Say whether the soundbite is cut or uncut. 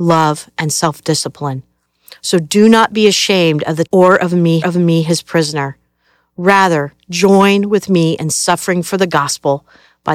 cut